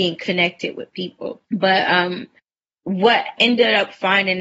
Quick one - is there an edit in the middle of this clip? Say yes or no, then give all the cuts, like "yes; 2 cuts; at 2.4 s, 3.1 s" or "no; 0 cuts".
yes; 2 cuts; at 1.4 s, 3.4 s